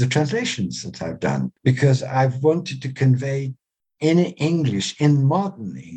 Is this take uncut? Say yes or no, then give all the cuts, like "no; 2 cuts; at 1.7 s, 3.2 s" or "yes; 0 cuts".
yes; 0 cuts